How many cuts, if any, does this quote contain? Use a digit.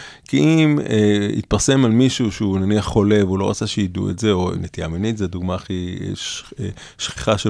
0